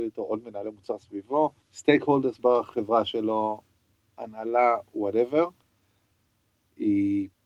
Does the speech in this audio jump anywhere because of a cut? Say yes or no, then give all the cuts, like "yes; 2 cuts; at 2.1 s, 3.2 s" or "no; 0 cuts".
yes; 1 cut; at 1.6 s